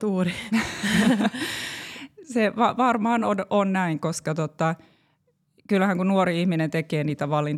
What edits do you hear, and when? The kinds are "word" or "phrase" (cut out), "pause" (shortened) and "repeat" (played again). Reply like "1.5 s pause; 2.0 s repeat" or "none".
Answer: none